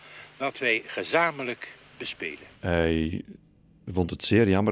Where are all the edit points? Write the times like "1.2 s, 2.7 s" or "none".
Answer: 2.5 s